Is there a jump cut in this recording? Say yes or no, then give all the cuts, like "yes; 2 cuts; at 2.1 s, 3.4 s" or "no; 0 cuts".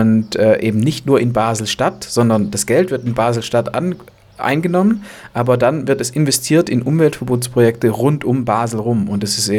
no; 0 cuts